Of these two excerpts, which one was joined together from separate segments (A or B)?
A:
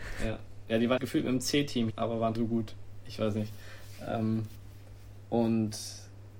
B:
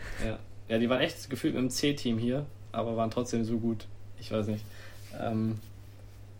A